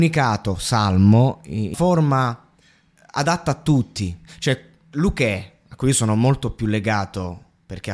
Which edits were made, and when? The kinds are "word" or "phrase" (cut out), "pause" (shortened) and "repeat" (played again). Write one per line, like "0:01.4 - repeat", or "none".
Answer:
0:01.7 - word